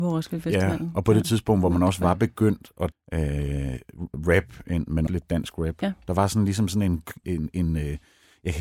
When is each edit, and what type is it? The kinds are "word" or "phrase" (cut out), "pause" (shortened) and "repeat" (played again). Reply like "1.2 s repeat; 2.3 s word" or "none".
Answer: 2.9 s word; 4.1 s word; 5.1 s word; 7.2 s word